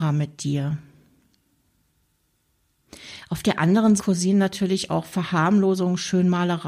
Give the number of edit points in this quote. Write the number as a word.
one